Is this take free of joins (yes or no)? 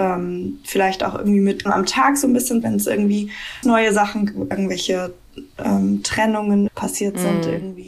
no